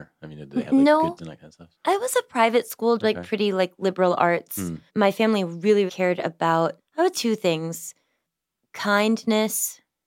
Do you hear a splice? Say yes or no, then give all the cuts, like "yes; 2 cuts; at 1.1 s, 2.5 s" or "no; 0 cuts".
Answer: yes; 7 cuts; at 1.2 s, 1.7 s, 3.0 s, 4.9 s, 5.9 s, 6.8 s, 7.1 s